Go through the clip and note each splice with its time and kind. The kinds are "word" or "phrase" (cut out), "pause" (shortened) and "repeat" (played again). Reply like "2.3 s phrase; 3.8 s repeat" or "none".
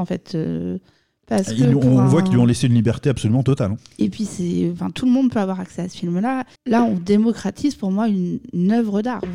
6.5 s pause